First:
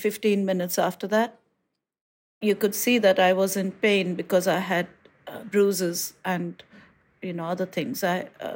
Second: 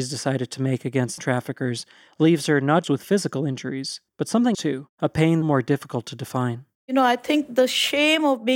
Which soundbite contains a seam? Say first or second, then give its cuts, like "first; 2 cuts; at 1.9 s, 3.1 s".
second; 7 cuts; at 1.2 s, 2.8 s, 4.1 s, 4.5 s, 4.9 s, 5.4 s, 6.7 s